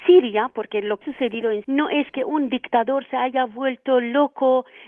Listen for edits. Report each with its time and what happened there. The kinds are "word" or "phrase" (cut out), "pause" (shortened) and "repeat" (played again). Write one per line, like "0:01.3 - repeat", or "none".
0:01.0 - word
0:01.6 - word